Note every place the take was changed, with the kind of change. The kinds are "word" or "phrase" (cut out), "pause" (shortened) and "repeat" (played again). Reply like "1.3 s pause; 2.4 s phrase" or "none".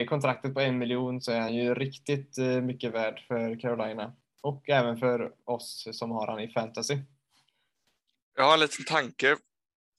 none